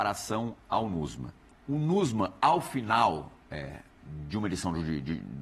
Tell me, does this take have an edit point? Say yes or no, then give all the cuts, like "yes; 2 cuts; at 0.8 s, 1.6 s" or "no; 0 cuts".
yes; 1 cut; at 1.5 s